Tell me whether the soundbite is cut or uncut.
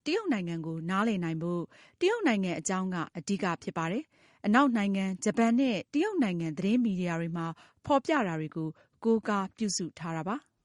uncut